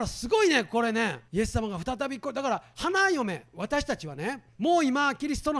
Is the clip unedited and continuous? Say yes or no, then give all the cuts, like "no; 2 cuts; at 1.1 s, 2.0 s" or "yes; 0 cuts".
no; 2 cuts; at 1.3 s, 4.5 s